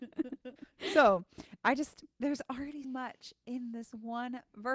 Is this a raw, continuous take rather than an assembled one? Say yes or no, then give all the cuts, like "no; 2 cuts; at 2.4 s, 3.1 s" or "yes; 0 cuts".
no; 2 cuts; at 2.1 s, 2.8 s